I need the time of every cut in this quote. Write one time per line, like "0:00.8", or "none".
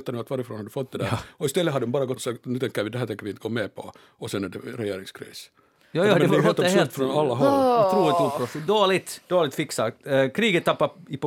0:02.2
0:09.2